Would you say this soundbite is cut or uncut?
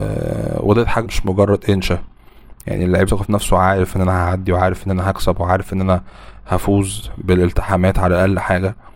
cut